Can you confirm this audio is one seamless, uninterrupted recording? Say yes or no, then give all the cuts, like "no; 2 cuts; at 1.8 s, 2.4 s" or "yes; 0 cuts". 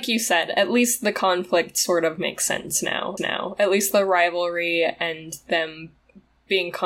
no; 1 cut; at 3.2 s